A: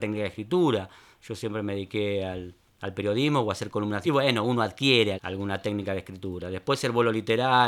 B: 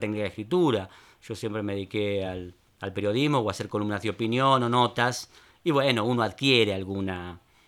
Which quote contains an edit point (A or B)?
A